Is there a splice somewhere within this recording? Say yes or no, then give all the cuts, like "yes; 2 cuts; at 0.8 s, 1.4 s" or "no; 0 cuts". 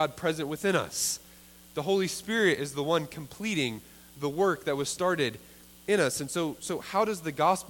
no; 0 cuts